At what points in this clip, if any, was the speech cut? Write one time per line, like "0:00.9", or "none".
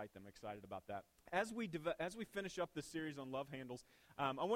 0:01.1

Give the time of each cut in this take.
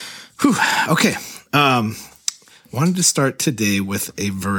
none

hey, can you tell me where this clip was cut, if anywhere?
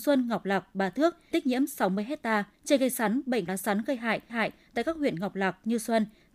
0:01.3
0:02.5
0:03.5
0:04.3

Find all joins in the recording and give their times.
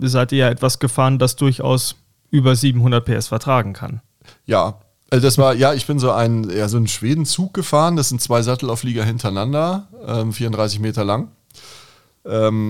none

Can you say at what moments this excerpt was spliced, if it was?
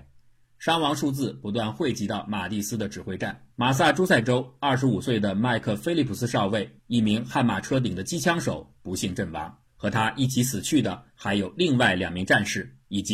0:03.5
0:06.8
0:09.7

